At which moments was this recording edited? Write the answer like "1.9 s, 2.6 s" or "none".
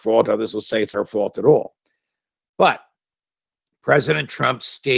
0.9 s